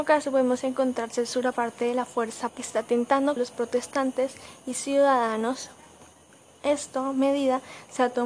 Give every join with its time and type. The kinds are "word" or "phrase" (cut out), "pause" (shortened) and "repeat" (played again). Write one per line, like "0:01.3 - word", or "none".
0:01.5 - word
0:02.5 - word
0:03.4 - word

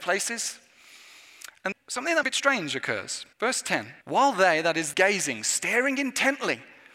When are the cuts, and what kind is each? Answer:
0:01.7 - word
0:02.2 - phrase
0:03.3 - pause
0:04.0 - pause
0:04.9 - phrase

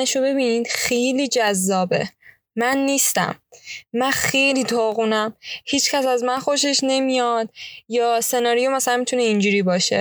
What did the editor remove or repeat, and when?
none

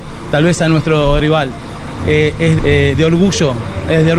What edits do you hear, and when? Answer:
0:01.2 - word
0:02.6 - word

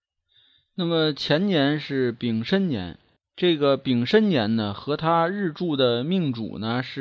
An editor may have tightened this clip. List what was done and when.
0:03.2 - pause

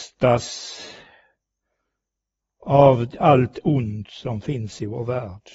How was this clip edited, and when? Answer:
none

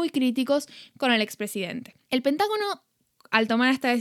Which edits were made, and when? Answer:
0:02.0 - pause

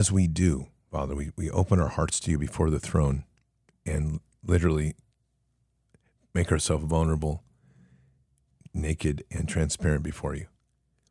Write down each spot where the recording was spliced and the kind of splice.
none

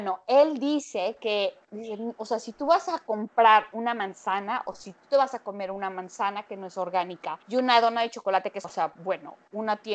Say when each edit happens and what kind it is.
0:07.4 - pause
0:08.6 - word

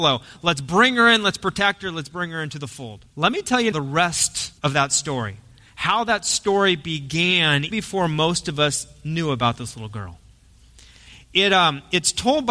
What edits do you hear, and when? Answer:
0:03.1 - pause
0:03.7 - word
0:04.6 - pause
0:07.7 - word

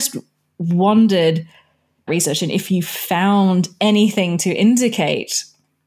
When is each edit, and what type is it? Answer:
0:02.1 - phrase

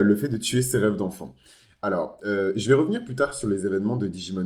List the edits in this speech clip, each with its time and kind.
none

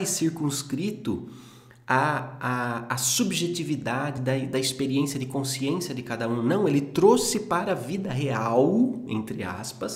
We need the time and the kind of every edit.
none

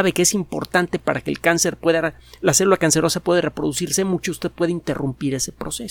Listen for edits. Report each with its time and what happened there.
none

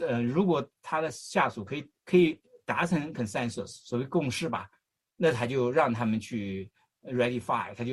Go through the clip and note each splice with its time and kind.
0:02.0 - pause

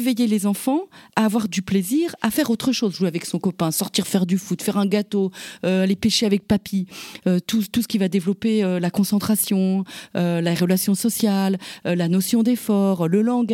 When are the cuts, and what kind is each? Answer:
none

